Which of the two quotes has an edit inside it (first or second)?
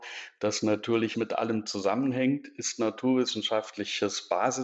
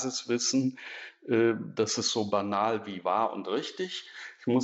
first